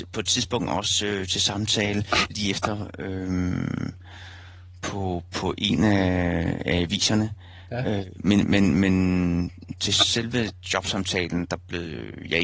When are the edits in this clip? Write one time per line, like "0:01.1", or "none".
none